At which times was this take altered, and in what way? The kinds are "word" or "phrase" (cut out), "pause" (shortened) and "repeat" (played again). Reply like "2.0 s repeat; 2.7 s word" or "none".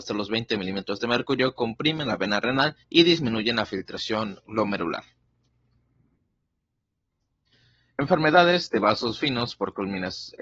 2.8 s pause